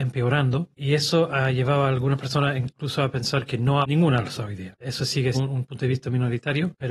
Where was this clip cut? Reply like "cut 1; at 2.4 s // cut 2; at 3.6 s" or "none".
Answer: cut 1; at 3.8 s // cut 2; at 5.3 s